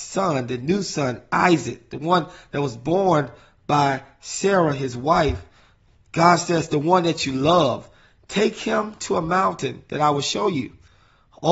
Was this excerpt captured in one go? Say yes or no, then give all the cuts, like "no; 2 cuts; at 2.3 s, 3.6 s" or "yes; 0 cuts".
yes; 0 cuts